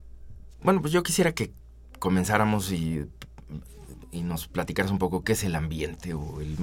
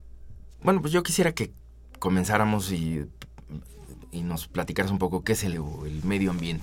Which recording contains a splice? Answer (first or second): second